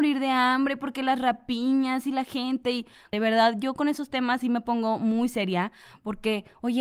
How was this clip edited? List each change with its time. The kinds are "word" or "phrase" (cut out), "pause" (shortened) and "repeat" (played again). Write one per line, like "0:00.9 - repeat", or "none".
none